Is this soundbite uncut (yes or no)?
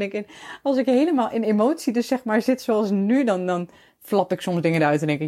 yes